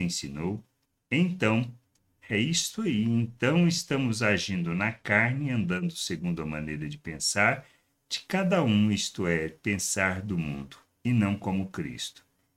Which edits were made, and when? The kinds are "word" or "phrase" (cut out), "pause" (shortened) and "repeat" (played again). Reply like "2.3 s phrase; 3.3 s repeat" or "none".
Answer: none